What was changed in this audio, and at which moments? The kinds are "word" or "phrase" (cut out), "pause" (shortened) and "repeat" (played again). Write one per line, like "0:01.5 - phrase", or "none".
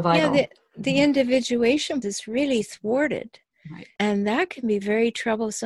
0:02.0 - word
0:04.0 - word